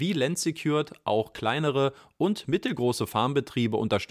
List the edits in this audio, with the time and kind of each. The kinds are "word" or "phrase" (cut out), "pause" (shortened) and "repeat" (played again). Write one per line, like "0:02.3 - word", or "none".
none